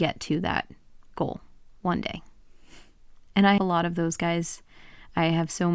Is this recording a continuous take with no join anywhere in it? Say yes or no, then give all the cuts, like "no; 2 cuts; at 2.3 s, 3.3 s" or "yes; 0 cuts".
no; 1 cut; at 3.6 s